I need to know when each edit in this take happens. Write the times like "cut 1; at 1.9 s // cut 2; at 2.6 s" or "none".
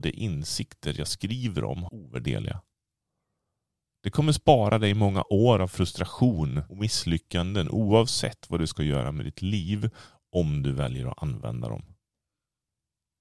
cut 1; at 1.9 s // cut 2; at 6.7 s